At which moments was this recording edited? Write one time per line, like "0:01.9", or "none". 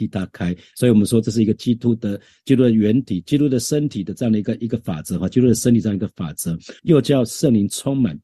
0:06.8